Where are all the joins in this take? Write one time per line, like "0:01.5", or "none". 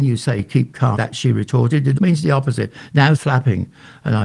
0:01.0
0:02.0
0:03.2